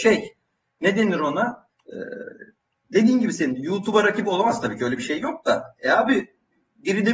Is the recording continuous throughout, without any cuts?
no; 1 cut; at 1.7 s

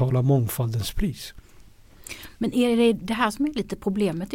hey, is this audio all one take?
yes; 0 cuts

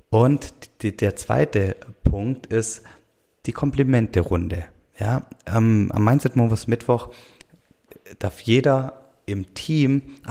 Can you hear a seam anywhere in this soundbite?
no; 0 cuts

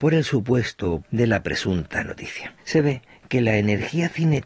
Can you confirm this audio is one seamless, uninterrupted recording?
no; 1 cut; at 1.0 s

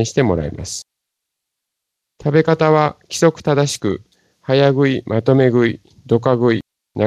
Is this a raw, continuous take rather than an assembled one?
yes; 0 cuts

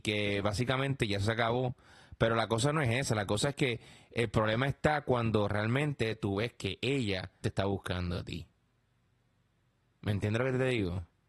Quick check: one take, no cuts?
no; 1 cut; at 7.4 s

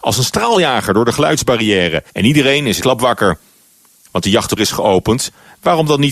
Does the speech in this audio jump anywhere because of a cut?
yes; 4 cuts; at 2.1 s, 2.8 s, 4.2 s, 4.6 s

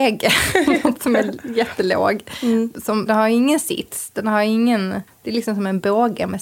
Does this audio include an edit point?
yes; 2 cuts; at 3.1 s, 5.1 s

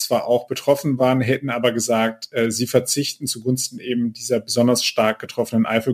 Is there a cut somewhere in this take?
no; 0 cuts

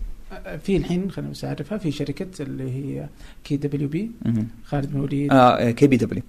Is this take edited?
no; 0 cuts

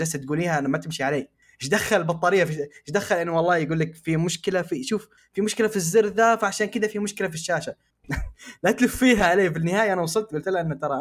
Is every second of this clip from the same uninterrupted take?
yes; 0 cuts

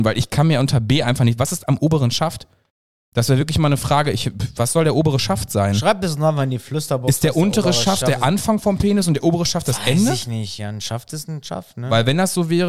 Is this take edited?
no; 0 cuts

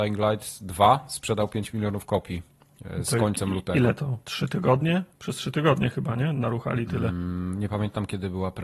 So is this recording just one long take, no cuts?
no; 2 cuts; at 4.2 s, 5.1 s

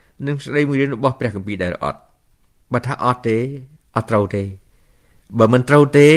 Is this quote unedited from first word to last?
yes; 0 cuts

